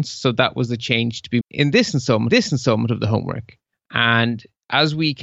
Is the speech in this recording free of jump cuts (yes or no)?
no